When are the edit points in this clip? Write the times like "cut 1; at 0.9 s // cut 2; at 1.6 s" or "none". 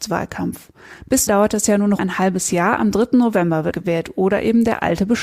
cut 1; at 1.3 s // cut 2; at 2.0 s // cut 3; at 3.7 s

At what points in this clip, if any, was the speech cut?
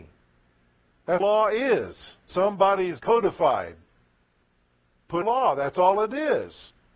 cut 1; at 1.2 s // cut 2; at 2.3 s // cut 3; at 3.0 s // cut 4; at 5.2 s

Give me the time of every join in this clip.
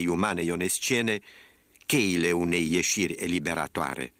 none

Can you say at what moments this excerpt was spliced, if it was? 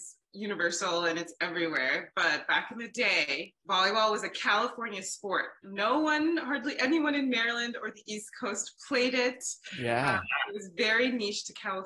cut 1; at 3.6 s

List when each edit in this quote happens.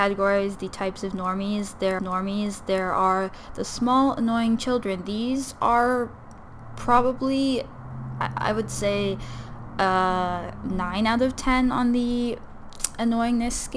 cut 1; at 2.0 s

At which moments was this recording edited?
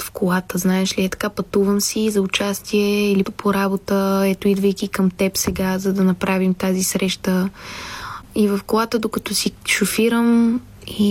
cut 1; at 3.2 s

